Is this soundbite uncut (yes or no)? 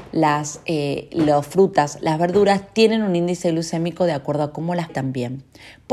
no